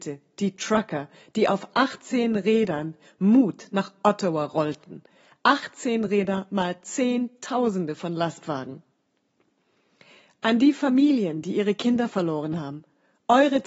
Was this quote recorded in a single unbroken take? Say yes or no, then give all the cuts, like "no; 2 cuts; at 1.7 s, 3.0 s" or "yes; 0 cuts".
yes; 0 cuts